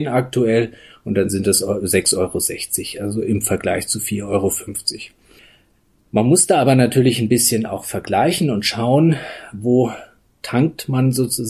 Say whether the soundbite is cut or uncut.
uncut